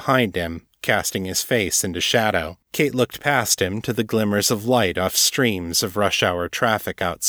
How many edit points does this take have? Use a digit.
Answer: 1